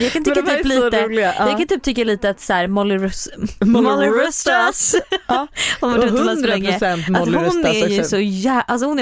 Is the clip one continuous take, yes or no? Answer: yes